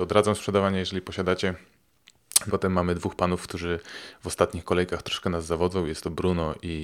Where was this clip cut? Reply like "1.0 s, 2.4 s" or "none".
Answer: 2.5 s